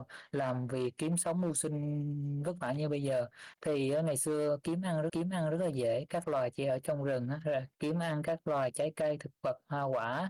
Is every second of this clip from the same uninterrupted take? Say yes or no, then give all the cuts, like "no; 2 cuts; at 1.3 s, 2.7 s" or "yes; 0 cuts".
no; 2 cuts; at 5.1 s, 7.7 s